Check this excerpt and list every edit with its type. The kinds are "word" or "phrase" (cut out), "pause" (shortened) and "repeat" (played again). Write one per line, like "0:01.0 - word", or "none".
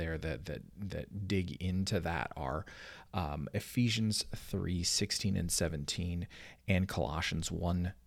none